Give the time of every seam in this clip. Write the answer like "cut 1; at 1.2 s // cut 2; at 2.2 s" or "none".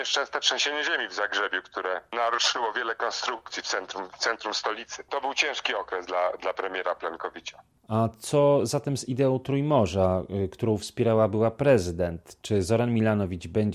none